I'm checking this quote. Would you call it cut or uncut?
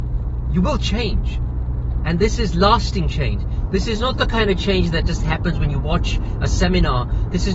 uncut